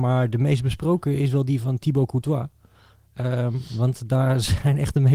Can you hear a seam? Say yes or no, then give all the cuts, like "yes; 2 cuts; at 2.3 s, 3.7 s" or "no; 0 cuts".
no; 0 cuts